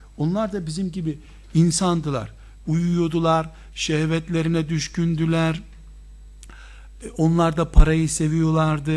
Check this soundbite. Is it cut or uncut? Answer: uncut